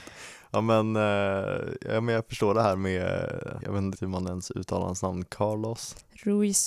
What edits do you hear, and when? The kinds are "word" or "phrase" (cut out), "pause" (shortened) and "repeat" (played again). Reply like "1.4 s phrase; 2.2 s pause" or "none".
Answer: 3.6 s word; 4.0 s word